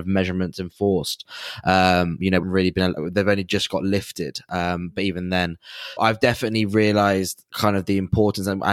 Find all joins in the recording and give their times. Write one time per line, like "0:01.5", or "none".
0:02.4
0:06.0
0:07.5